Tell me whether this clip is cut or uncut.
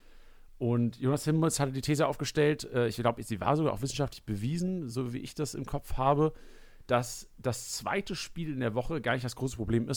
uncut